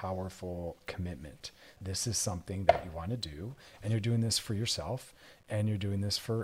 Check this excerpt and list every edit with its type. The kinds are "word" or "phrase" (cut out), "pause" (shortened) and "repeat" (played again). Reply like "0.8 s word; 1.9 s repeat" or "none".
1.8 s word